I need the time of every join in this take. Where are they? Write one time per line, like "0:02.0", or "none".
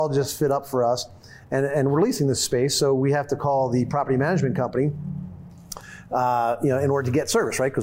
none